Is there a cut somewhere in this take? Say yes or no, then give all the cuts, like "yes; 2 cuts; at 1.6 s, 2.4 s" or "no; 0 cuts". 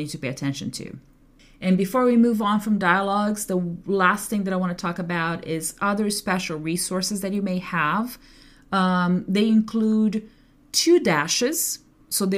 no; 0 cuts